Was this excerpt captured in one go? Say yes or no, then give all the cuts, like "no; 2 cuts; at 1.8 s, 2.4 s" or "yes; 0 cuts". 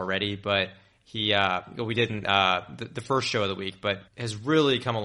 no; 1 cut; at 4.1 s